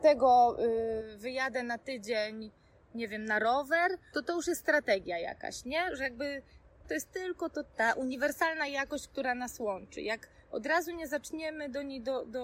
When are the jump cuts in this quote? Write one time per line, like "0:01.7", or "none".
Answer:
0:04.1
0:06.8
0:07.7